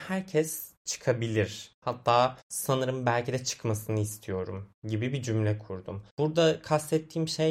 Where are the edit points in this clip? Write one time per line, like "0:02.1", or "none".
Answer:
0:02.4
0:06.1